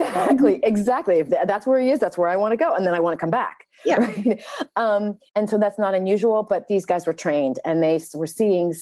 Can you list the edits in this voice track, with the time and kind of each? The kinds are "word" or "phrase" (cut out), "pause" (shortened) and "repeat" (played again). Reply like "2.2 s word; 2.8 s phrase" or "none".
5.3 s pause